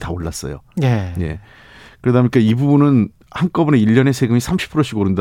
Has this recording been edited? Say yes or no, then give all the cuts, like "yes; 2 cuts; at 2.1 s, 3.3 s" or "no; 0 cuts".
no; 0 cuts